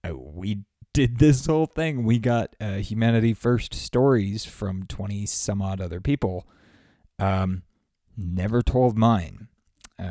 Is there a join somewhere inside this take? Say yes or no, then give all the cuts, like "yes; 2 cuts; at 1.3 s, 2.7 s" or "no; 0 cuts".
no; 0 cuts